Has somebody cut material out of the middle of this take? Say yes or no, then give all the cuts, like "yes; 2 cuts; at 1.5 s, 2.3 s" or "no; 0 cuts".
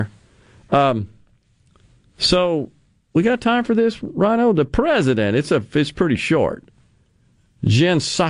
no; 0 cuts